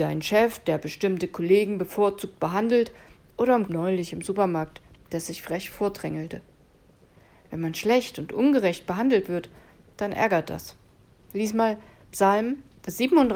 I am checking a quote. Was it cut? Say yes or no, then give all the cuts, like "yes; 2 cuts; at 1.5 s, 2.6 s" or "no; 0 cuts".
yes; 1 cut; at 3.7 s